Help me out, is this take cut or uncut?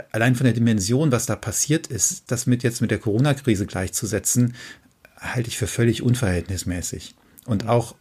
uncut